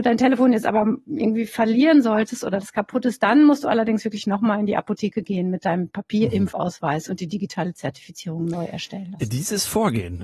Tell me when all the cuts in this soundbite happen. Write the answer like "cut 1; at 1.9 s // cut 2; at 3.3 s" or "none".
none